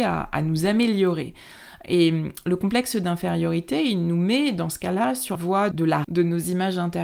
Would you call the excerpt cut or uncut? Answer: cut